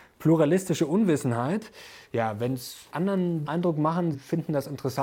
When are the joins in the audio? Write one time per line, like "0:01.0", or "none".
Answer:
0:02.9
0:03.5
0:04.1

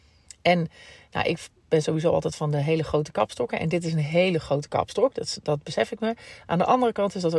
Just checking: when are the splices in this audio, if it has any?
none

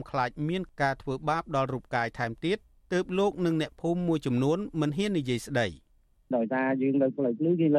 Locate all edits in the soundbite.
none

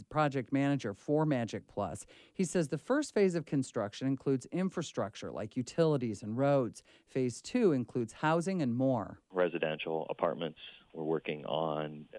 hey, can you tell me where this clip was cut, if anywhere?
none

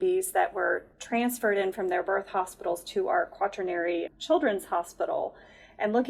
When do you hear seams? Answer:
0:00.9
0:04.1

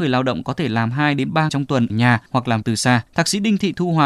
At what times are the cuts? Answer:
0:01.5
0:01.9
0:02.3
0:02.6
0:03.1

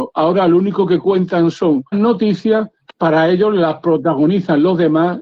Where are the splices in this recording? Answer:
0:01.9
0:02.9

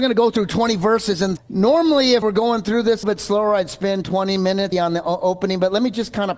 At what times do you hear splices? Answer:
0:01.4
0:02.2
0:03.0
0:04.7

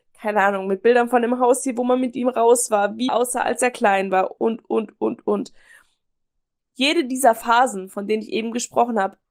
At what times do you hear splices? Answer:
0:03.1
0:04.4

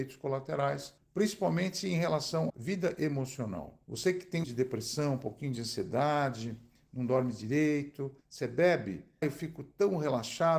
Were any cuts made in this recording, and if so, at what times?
0:01.0
0:02.5
0:03.8
0:04.4
0:08.2
0:09.2

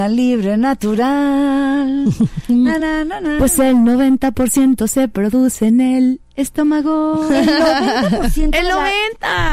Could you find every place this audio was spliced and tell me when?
none

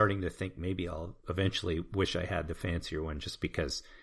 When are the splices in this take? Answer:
none

